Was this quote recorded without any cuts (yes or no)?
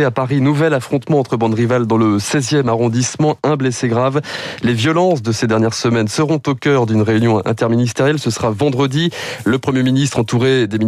yes